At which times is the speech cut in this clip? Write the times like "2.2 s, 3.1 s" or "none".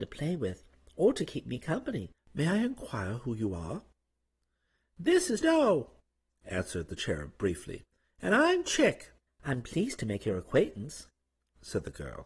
2.2 s, 5.4 s, 9.3 s